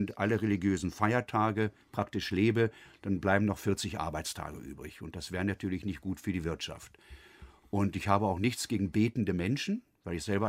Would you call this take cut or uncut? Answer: uncut